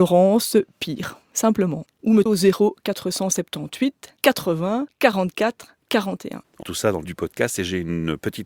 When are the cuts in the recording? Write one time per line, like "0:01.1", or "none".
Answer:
0:02.3
0:06.6
0:07.0